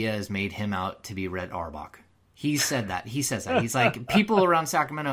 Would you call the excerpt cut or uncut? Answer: uncut